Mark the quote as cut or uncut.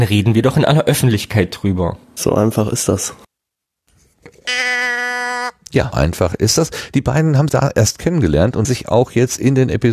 cut